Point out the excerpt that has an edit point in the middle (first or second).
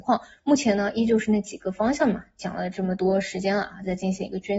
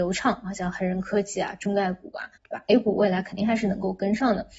second